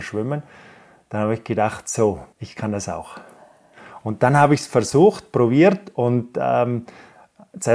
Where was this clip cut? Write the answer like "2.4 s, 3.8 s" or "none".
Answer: 2.3 s